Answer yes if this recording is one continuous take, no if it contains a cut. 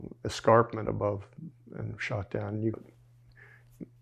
no